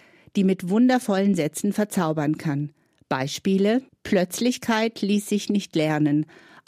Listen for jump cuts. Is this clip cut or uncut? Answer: cut